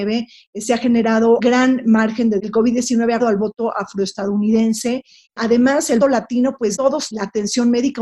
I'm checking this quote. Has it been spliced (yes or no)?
yes